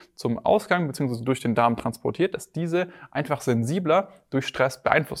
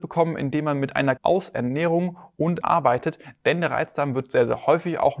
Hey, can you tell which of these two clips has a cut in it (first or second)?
second